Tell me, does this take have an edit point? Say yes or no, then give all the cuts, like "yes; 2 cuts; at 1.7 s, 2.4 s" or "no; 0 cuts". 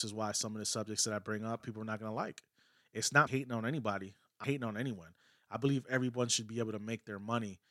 yes; 3 cuts; at 1.6 s, 3.3 s, 4.4 s